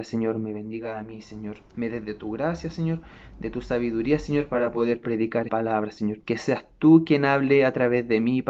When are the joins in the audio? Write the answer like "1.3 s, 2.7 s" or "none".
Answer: 5.5 s, 6.2 s

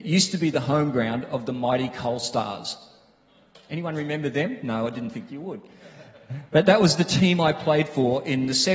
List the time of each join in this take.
none

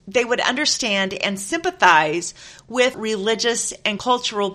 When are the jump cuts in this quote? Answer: 2.9 s

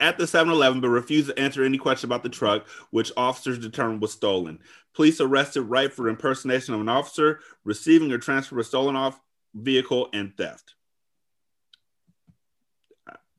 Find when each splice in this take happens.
none

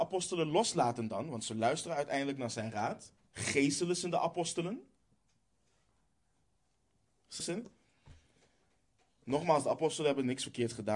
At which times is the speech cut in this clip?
3.3 s, 7.4 s

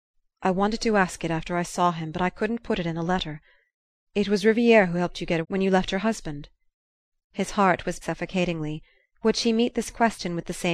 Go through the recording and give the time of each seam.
5.4 s, 8.0 s

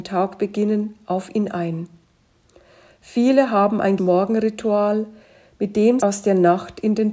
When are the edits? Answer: 4.0 s, 6.0 s

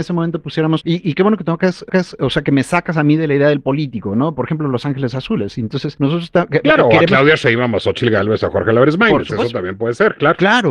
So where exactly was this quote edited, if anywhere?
1.9 s

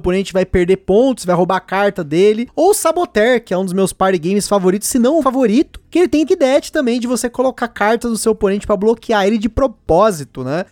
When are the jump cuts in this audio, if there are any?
5.2 s, 6.3 s

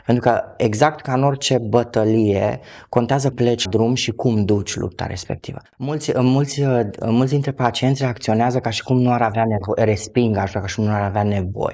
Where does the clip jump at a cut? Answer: 3.3 s, 3.7 s, 5.7 s

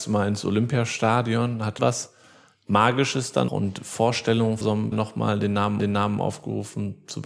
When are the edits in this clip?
1.8 s, 3.5 s, 4.6 s, 4.9 s, 5.8 s

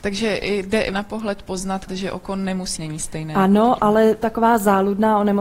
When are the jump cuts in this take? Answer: 0.9 s, 1.9 s, 2.8 s, 4.2 s

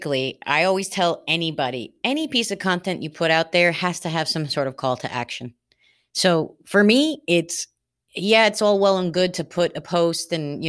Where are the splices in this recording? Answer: none

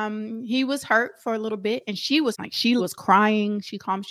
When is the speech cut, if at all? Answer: 2.3 s, 2.8 s

